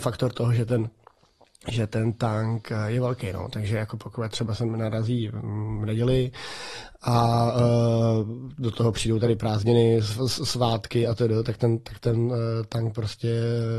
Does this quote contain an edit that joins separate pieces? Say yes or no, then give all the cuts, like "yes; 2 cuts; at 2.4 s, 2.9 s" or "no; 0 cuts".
no; 0 cuts